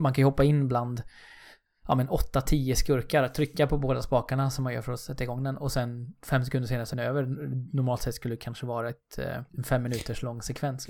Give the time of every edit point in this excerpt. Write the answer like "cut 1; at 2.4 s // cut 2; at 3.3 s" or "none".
cut 1; at 6.9 s // cut 2; at 9.5 s